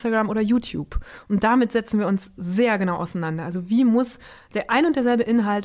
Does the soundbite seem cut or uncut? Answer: uncut